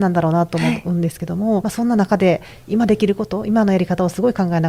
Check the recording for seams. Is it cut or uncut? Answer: cut